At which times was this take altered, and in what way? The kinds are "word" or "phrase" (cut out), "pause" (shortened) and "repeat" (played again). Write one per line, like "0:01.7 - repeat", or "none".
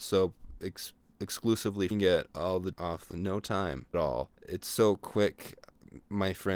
0:01.9 - phrase
0:02.3 - pause
0:02.7 - word
0:03.1 - word
0:03.9 - word
0:04.3 - pause